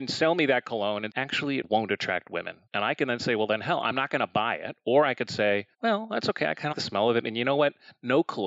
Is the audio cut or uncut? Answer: cut